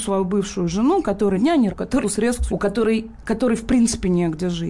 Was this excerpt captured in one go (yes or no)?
no